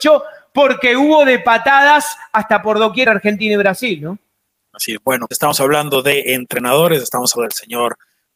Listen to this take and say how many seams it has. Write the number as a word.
four